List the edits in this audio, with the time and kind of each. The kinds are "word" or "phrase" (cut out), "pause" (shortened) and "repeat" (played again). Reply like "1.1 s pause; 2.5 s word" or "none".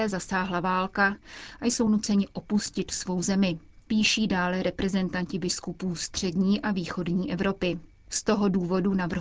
none